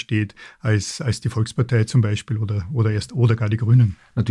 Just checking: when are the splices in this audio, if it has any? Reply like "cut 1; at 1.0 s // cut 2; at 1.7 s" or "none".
none